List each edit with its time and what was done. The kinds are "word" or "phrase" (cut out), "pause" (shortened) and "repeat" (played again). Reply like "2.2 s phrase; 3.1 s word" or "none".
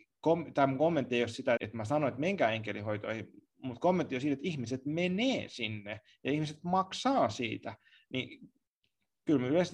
1.6 s phrase